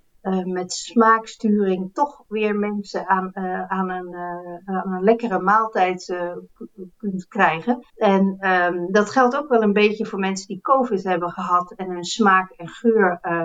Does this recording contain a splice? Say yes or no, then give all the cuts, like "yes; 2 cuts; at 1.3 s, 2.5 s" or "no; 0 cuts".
yes; 1 cut; at 7.9 s